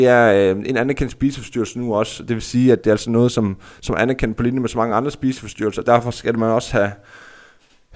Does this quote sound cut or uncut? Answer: uncut